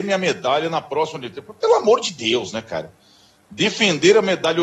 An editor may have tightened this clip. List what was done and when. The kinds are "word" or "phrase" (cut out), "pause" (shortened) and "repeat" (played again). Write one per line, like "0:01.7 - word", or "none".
none